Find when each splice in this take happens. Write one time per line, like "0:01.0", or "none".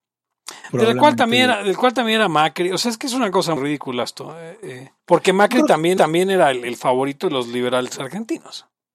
0:03.6
0:05.0
0:06.0

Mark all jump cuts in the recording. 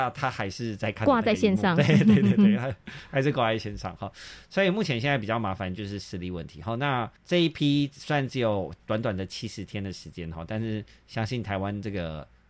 0:07.2

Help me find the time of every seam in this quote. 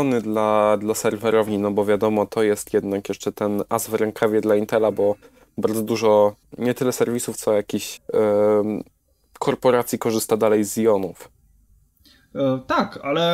0:06.4
0:08.0

